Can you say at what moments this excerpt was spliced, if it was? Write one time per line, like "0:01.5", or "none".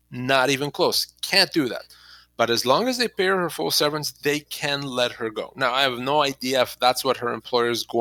none